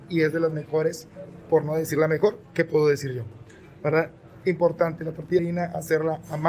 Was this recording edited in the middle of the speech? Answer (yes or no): yes